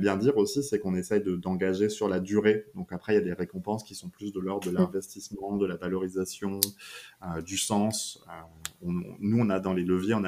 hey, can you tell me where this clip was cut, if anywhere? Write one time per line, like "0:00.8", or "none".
none